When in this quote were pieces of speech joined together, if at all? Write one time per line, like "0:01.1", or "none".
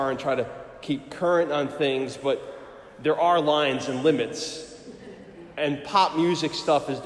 none